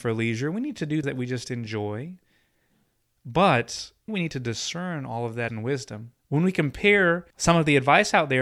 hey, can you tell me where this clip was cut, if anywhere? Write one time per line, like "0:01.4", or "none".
0:01.0
0:04.1
0:05.5
0:06.2
0:07.3